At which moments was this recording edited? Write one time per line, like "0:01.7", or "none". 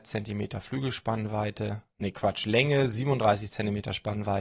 none